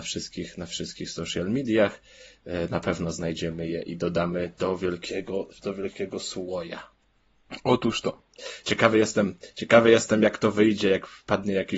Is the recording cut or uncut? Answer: uncut